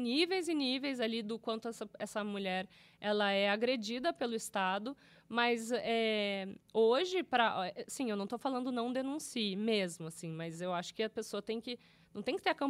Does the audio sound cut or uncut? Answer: uncut